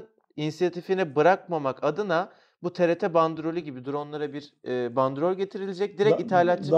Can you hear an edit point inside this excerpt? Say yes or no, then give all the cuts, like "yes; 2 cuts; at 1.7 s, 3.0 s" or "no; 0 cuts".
no; 0 cuts